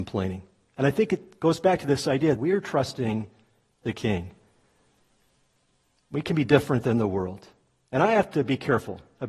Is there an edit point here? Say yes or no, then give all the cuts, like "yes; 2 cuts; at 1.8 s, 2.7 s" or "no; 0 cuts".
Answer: yes; 1 cut; at 2.4 s